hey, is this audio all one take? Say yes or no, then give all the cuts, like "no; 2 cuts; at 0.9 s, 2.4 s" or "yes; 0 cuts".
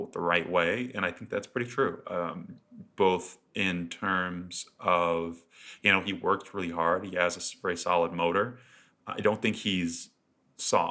yes; 0 cuts